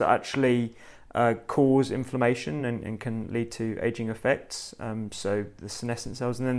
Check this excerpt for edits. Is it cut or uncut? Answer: uncut